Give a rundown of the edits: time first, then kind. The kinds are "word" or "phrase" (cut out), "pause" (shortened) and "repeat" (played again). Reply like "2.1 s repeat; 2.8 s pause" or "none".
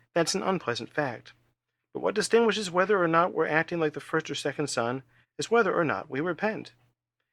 none